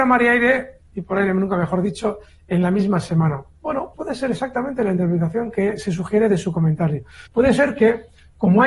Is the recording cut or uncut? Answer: cut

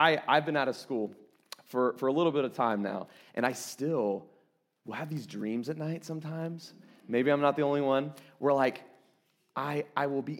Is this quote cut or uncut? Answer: uncut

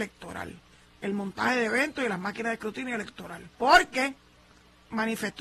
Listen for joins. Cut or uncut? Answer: cut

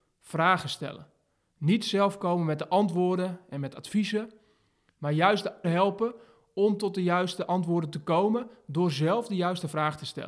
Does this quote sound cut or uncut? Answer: cut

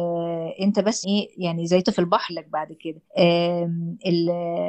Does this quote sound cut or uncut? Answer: cut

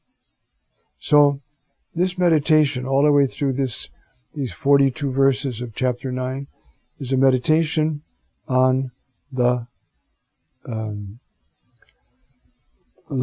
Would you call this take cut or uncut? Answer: uncut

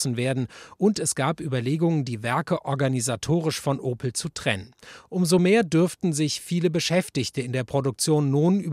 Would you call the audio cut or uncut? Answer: uncut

